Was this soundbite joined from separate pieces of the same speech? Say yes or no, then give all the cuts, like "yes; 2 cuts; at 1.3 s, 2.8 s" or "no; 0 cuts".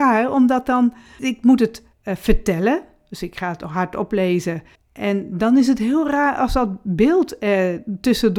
yes; 3 cuts; at 1.2 s, 1.9 s, 4.7 s